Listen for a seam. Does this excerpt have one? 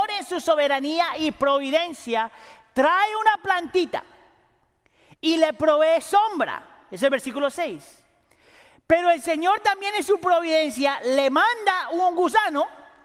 no; 0 cuts

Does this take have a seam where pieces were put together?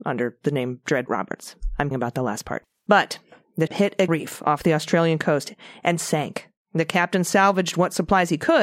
yes; 4 cuts; at 1.1 s, 1.9 s, 3.7 s, 4.1 s

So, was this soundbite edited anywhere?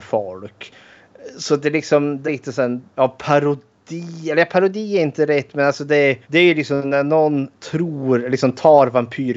yes; 3 cuts; at 2.2 s, 2.9 s, 6.2 s

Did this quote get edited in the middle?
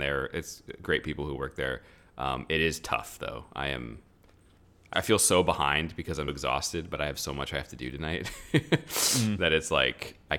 yes; 2 cuts; at 4.9 s, 6.3 s

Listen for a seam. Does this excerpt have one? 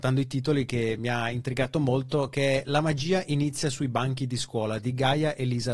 no; 0 cuts

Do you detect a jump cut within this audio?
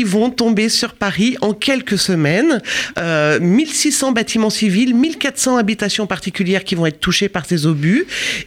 no; 0 cuts

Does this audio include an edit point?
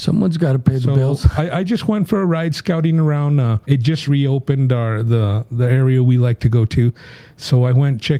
yes; 2 cuts; at 3.6 s, 4.1 s

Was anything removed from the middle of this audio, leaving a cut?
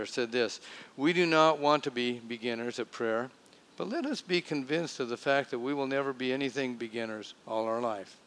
yes; 1 cut; at 6.8 s

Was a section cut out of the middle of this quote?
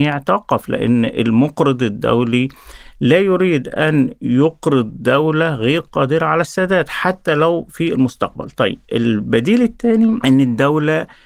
no; 0 cuts

